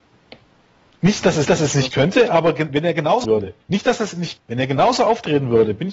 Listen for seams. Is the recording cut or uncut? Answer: cut